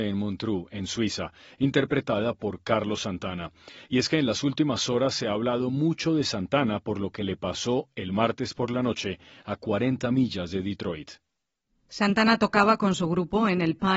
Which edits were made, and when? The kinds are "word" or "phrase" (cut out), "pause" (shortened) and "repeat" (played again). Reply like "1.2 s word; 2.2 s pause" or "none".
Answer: none